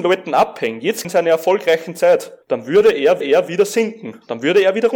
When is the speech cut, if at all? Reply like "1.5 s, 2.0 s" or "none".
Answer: 1.0 s, 2.4 s, 3.2 s